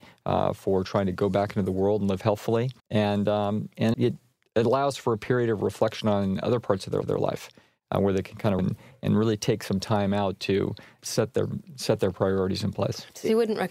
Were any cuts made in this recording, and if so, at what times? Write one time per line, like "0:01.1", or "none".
0:02.8
0:03.9
0:07.0
0:08.6
0:11.0